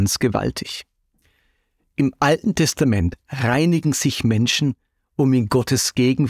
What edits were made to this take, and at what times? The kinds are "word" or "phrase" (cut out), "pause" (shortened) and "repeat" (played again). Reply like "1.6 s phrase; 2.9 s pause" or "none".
none